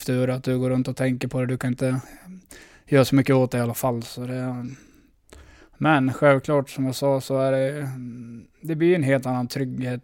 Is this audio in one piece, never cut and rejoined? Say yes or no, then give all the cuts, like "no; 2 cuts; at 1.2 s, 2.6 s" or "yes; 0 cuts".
yes; 0 cuts